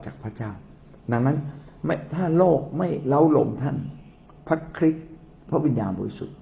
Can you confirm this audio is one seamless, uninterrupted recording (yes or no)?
no